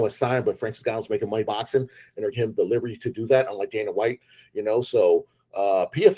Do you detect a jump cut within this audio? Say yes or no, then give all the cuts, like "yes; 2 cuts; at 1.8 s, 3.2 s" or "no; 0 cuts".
yes; 2 cuts; at 1.4 s, 2.3 s